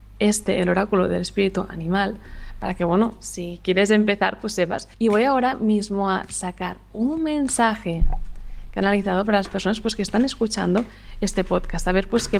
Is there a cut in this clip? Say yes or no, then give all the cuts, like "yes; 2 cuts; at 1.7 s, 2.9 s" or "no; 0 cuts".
yes; 1 cut; at 4.9 s